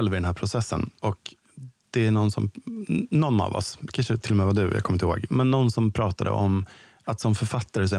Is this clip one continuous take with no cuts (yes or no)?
no